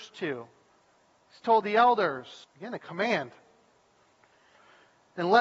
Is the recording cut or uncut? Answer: cut